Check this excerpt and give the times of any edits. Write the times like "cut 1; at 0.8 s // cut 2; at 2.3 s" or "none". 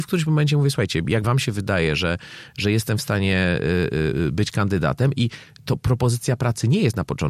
cut 1; at 1.2 s